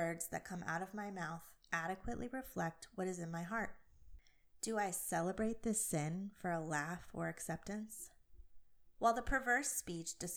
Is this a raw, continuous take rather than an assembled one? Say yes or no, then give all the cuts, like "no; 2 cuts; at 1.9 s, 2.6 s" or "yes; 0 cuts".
yes; 0 cuts